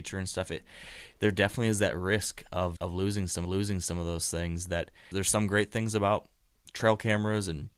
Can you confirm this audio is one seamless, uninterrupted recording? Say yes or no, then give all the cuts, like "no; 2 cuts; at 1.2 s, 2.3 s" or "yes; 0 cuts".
no; 3 cuts; at 2.8 s, 3.4 s, 5.1 s